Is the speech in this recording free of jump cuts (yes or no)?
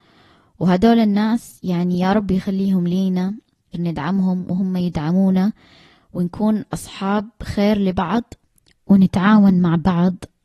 no